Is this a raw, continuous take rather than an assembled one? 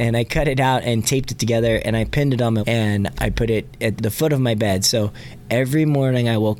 no; 3 cuts; at 2.6 s, 3.1 s, 4.0 s

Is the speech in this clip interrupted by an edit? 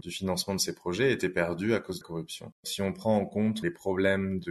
yes; 2 cuts; at 2.0 s, 2.5 s

